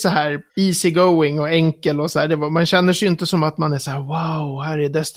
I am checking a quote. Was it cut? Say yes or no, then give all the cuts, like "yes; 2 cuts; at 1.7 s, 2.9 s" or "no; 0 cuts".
no; 0 cuts